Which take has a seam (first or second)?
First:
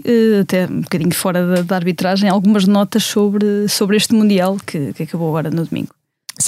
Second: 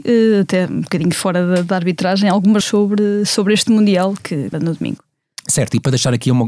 second